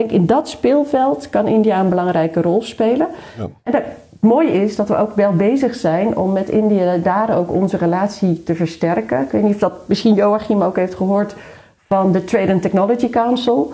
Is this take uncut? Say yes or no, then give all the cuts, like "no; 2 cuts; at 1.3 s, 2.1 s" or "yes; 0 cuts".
yes; 0 cuts